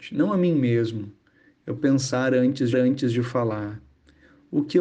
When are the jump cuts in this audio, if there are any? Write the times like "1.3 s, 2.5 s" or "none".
1.8 s, 2.7 s

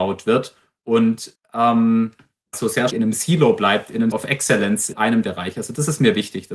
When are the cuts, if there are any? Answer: 1.3 s, 2.5 s, 2.9 s, 4.1 s, 4.9 s, 5.2 s

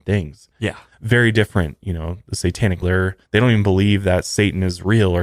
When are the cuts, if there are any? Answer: 2.8 s, 3.2 s

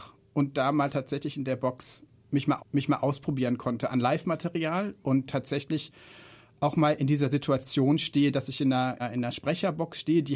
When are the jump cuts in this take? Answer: 2.6 s, 9.0 s

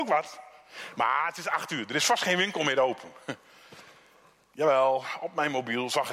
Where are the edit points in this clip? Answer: none

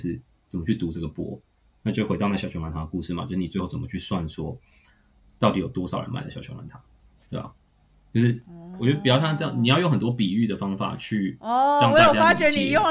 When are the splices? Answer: none

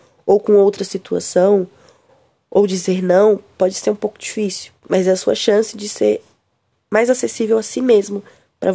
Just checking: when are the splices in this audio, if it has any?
4.8 s

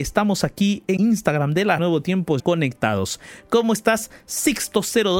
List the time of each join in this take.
1.0 s, 1.8 s, 2.4 s

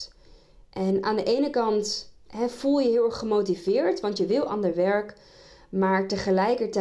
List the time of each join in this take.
none

